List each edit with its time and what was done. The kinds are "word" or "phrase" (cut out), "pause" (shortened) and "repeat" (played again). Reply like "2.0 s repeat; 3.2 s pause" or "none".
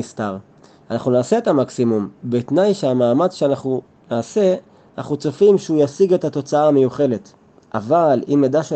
none